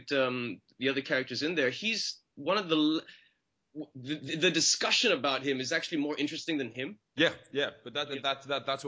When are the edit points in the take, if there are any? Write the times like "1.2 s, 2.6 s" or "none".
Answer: none